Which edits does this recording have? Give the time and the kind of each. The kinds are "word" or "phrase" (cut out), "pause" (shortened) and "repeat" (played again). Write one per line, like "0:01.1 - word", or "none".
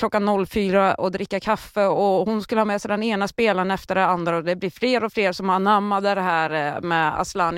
none